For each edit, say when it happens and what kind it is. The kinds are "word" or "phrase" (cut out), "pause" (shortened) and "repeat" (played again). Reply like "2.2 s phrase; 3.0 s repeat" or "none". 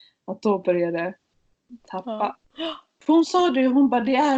2.4 s pause